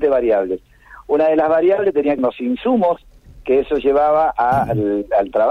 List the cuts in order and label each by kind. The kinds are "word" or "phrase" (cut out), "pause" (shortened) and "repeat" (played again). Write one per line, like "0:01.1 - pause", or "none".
0:02.2 - phrase